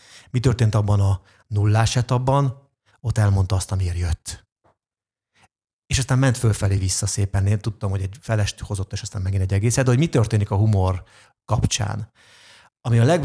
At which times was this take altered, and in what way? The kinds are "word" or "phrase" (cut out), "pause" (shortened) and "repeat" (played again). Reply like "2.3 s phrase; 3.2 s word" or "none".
none